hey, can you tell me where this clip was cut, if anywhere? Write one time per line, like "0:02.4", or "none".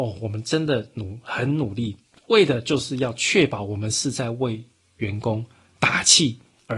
0:02.0